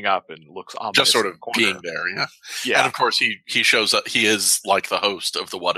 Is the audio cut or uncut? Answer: uncut